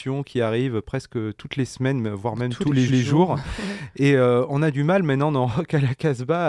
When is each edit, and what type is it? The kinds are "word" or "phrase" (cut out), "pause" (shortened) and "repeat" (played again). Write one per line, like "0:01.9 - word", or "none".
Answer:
0:02.9 - repeat